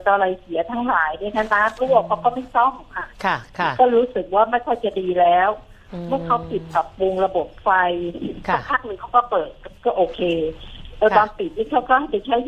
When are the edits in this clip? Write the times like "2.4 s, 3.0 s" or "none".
3.1 s, 9.8 s